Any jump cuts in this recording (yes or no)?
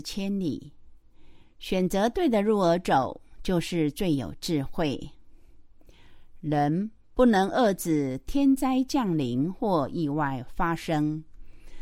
no